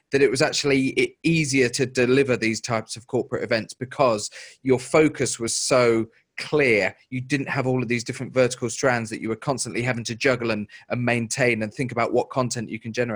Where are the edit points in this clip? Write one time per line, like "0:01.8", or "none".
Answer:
none

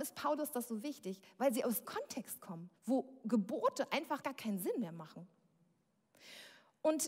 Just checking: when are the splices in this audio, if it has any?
0:01.9
0:02.8
0:04.2

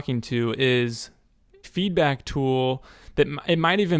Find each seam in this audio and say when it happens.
0:01.6

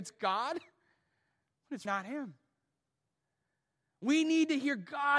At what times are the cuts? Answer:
0:01.8

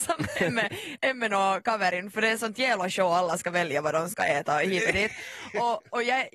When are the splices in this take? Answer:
none

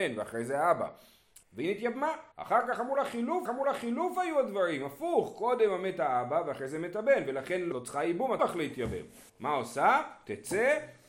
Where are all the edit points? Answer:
0:01.4
0:02.3
0:03.5
0:07.7
0:08.4
0:09.3

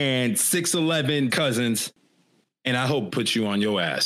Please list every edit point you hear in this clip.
0:01.3
0:03.1

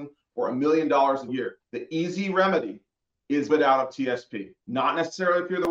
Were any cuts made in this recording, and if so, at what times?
0:01.3
0:01.7
0:03.5
0:04.6

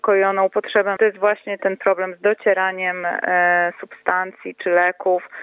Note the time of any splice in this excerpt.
0:01.0
0:01.6

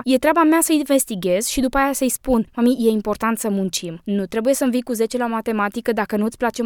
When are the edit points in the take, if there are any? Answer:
0:02.5

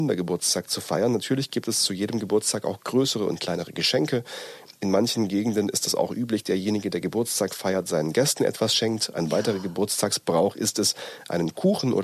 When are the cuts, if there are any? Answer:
0:06.4

